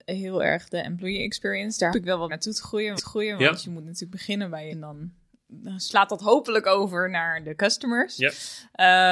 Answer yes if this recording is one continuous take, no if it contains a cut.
no